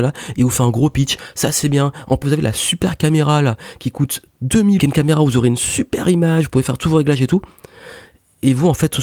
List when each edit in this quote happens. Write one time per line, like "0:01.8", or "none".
0:02.2
0:04.8